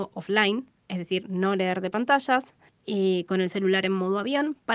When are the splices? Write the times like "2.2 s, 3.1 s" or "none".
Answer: 2.7 s